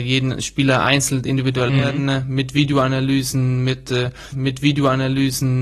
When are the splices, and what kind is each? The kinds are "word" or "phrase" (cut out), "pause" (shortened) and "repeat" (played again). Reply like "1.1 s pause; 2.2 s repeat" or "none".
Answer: 1.7 s word; 4.3 s repeat